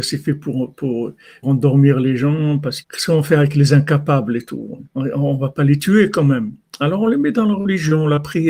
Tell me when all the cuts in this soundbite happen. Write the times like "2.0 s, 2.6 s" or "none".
1.4 s, 2.8 s, 4.9 s